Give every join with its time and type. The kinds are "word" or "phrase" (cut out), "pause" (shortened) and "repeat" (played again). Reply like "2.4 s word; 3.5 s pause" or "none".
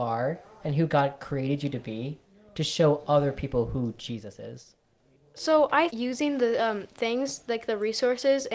5.9 s word

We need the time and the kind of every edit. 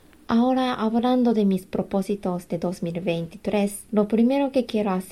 3.9 s pause

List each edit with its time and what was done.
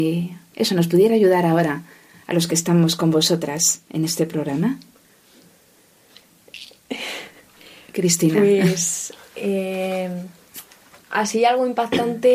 none

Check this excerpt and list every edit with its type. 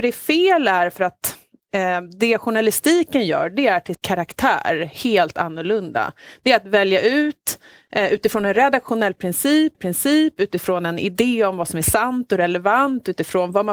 3.9 s word; 9.7 s repeat

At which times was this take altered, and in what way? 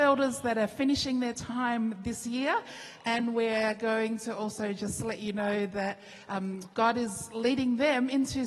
6.7 s pause

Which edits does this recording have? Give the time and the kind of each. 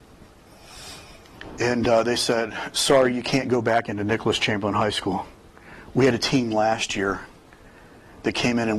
none

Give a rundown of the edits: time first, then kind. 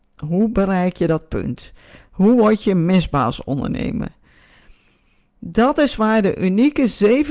none

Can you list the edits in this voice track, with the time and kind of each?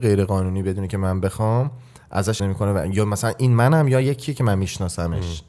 2.4 s word

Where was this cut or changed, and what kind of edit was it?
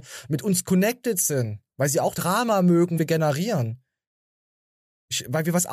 2.1 s word; 3.0 s word

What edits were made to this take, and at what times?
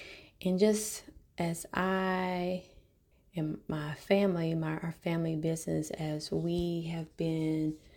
3.1 s pause

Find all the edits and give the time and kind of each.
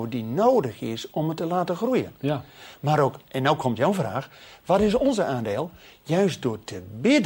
none

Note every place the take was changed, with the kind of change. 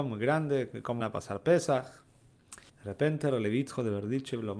1.0 s word; 2.7 s pause

